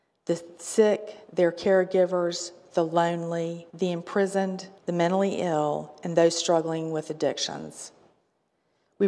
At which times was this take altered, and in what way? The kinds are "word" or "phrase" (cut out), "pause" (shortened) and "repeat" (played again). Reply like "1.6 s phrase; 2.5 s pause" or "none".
1.2 s pause; 3.7 s pause; 4.8 s pause